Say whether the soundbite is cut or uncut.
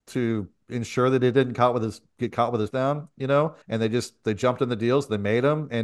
cut